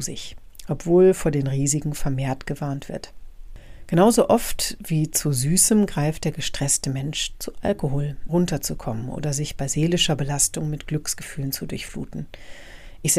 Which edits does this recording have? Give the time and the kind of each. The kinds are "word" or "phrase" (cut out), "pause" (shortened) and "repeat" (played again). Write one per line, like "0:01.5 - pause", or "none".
0:08.3 - word

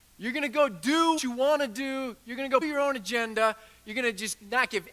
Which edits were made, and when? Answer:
0:01.2 - word
0:02.6 - word

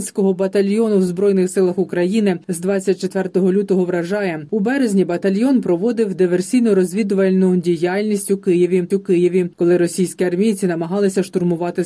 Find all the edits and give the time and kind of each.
0:08.9 - repeat

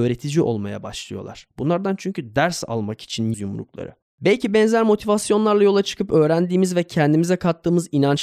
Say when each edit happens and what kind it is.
0:03.3 - word

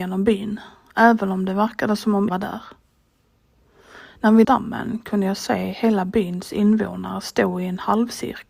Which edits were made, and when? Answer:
0:02.3 - word
0:04.4 - phrase

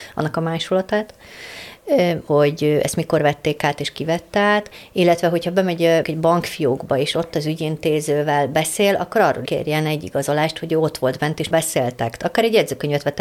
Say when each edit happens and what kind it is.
0:02.3 - word
0:06.0 - word
0:09.5 - word
0:11.5 - word

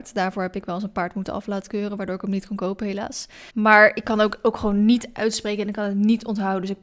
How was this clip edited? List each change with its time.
0:03.5 - pause

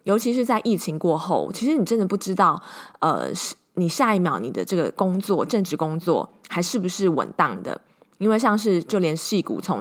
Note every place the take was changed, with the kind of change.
none

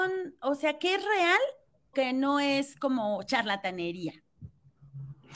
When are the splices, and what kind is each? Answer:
0:01.9 - word

